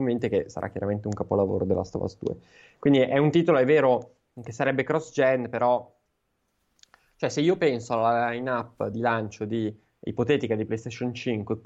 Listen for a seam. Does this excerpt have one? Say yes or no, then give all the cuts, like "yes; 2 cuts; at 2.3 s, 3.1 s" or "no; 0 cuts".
no; 0 cuts